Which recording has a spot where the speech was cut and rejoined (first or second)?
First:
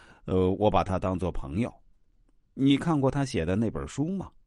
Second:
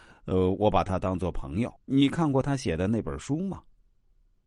second